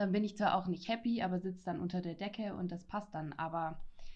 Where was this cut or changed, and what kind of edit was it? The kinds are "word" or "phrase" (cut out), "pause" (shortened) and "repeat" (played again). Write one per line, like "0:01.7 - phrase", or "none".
none